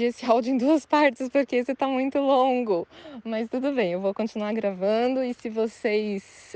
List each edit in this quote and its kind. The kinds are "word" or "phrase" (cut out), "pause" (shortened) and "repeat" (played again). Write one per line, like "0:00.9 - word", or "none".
none